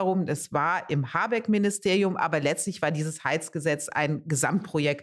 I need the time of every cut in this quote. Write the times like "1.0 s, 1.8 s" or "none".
none

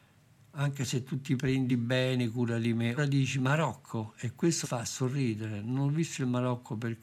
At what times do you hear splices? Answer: 1.7 s, 3.0 s, 4.6 s

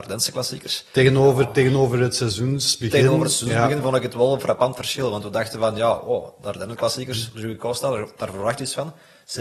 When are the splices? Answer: none

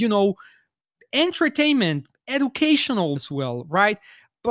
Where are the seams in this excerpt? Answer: 3.2 s

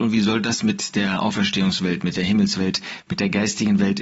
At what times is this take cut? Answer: none

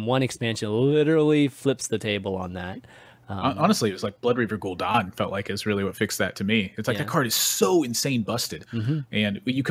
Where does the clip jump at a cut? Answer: none

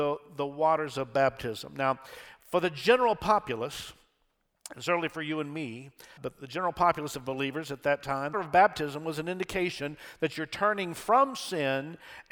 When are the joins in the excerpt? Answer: 6.2 s, 8.3 s

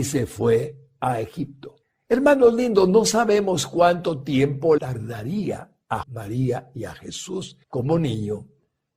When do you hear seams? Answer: 1.8 s, 4.8 s, 6.0 s, 7.6 s

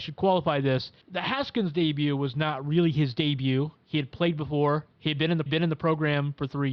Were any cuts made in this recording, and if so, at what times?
1.0 s, 4.9 s, 5.5 s

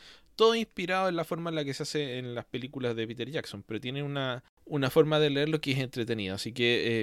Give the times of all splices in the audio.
4.5 s

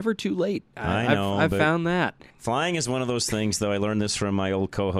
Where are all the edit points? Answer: 2.3 s

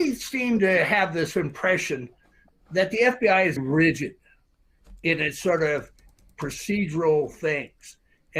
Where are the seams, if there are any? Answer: 3.6 s

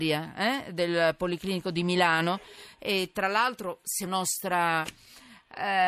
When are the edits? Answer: 4.1 s

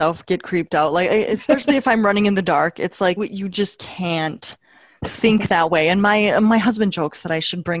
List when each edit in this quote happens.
3.2 s

